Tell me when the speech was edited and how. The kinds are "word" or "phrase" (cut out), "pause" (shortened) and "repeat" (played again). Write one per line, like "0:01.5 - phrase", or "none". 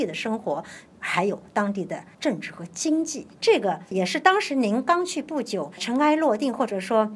0:02.1 - pause
0:03.3 - pause